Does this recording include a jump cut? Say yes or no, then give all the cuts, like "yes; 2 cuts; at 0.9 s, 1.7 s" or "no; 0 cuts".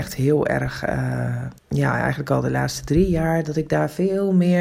yes; 1 cut; at 1.6 s